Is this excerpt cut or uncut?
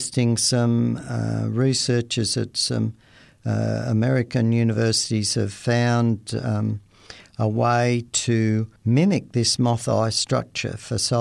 cut